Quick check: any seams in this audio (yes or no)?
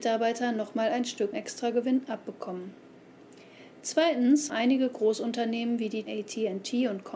yes